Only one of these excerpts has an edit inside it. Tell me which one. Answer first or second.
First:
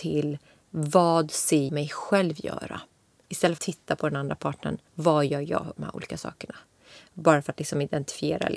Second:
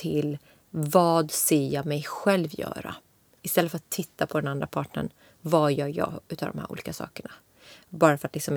first